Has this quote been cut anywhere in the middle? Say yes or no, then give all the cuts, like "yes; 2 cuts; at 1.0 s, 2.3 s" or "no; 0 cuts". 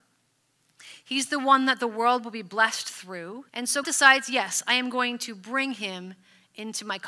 yes; 2 cuts; at 3.5 s, 3.8 s